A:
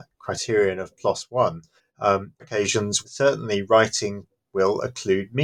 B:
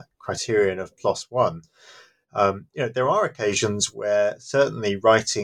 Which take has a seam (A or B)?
A